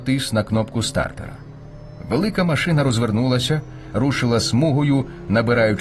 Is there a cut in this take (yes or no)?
no